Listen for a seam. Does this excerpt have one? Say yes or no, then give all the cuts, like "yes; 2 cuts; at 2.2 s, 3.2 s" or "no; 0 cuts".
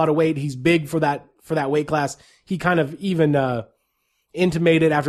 no; 0 cuts